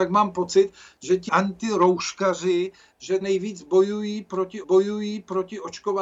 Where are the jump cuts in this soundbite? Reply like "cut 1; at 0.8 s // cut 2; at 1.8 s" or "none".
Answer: cut 1; at 1.3 s // cut 2; at 3.2 s // cut 3; at 4.6 s